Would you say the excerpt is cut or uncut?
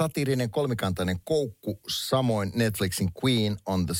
uncut